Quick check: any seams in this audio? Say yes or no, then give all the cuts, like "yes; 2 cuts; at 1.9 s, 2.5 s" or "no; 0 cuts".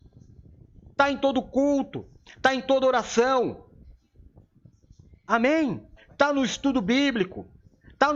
yes; 1 cut; at 6.0 s